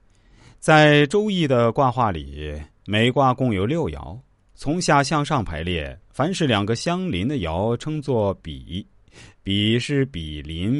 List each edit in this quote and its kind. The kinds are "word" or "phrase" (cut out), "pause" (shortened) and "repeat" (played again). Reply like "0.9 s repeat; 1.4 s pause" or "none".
none